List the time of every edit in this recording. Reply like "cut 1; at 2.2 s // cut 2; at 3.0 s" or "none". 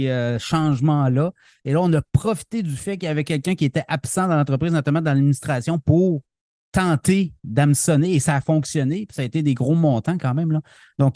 cut 1; at 6.7 s